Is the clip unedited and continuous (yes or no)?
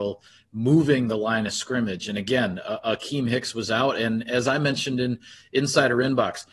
yes